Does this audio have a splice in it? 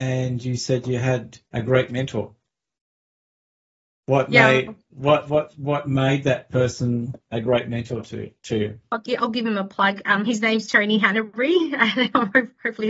yes; 1 cut; at 1.5 s

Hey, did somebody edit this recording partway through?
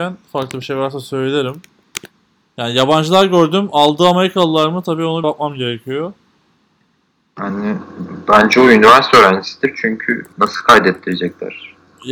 yes; 2 cuts; at 5.2 s, 10.3 s

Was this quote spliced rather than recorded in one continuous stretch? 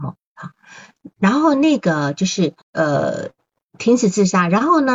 yes; 1 cut; at 2.6 s

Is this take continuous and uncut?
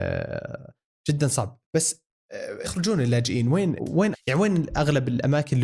no; 3 cuts; at 2.6 s, 3.8 s, 4.1 s

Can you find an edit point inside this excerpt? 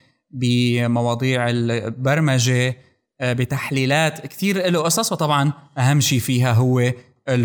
no; 0 cuts

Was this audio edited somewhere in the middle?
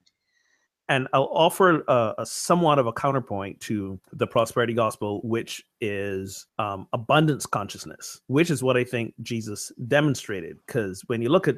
yes; 3 cuts; at 4.0 s, 6.5 s, 8.2 s

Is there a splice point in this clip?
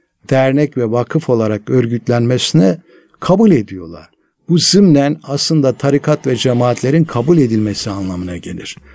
no; 0 cuts

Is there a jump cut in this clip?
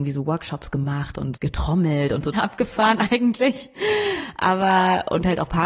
yes; 2 cuts; at 1.4 s, 2.3 s

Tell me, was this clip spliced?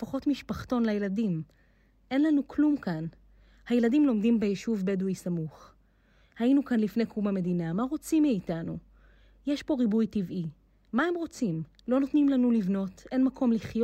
no; 0 cuts

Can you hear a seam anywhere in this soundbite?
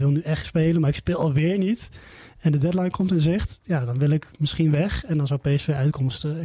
no; 0 cuts

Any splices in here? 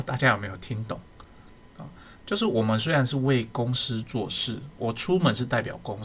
yes; 1 cut; at 2.2 s

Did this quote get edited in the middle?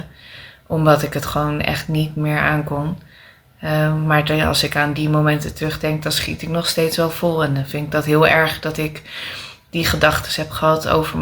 no; 0 cuts

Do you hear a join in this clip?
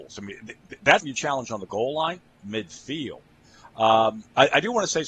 yes; 2 cuts; at 1.0 s, 2.4 s

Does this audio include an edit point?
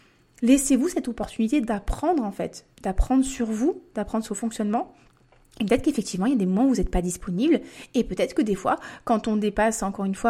yes; 2 cuts; at 2.7 s, 4.3 s

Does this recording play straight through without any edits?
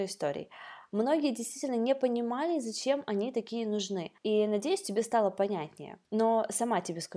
no; 2 cuts; at 4.2 s, 6.0 s

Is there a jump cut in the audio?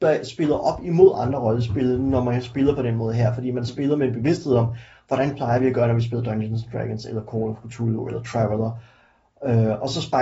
no; 0 cuts

